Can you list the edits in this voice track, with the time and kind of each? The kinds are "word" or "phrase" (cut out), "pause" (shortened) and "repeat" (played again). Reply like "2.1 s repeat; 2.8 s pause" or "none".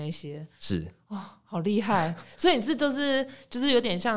none